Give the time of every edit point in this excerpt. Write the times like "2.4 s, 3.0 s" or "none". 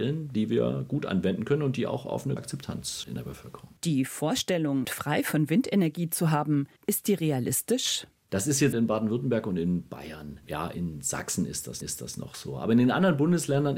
2.4 s, 3.0 s, 3.8 s, 4.8 s, 6.8 s, 8.7 s, 10.4 s, 11.8 s